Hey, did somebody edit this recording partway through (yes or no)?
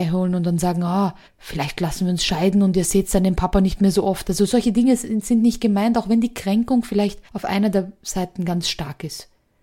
yes